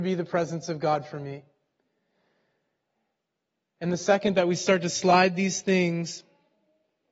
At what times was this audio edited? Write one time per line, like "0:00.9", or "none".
none